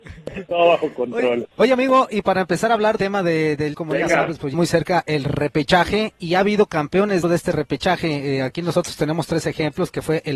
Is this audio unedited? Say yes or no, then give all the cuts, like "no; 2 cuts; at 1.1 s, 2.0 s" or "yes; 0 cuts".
no; 5 cuts; at 1.5 s, 3.0 s, 3.7 s, 4.5 s, 7.2 s